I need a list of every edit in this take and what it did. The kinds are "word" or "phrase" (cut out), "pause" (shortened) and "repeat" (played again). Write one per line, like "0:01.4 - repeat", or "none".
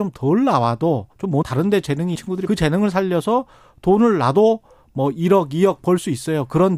0:01.1 - pause
0:01.4 - word
0:02.1 - word
0:02.5 - phrase